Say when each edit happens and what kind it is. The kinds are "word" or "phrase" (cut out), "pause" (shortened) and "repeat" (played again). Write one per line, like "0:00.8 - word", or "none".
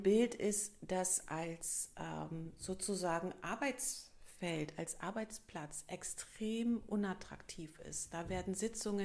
none